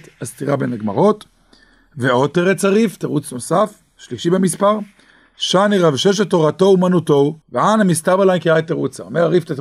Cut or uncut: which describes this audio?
cut